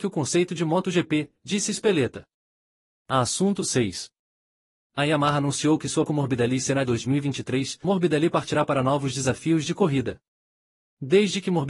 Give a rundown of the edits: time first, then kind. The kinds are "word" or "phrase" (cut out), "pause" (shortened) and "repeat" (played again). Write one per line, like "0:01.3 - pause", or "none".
0:06.1 - phrase
0:06.9 - phrase
0:07.8 - word